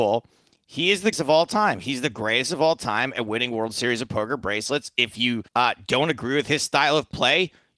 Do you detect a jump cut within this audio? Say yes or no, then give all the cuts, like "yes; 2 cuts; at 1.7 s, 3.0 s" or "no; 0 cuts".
yes; 2 cuts; at 1.1 s, 5.5 s